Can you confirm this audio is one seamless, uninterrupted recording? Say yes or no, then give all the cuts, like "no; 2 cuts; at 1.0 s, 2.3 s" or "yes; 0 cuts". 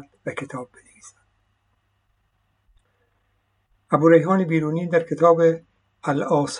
yes; 0 cuts